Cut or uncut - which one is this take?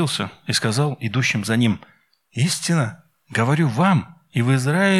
uncut